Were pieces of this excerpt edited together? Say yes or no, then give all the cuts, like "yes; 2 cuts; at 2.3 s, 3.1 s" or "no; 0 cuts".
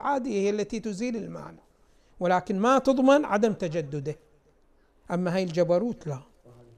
no; 0 cuts